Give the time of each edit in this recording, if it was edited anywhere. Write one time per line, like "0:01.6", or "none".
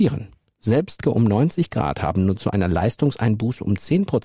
0:01.0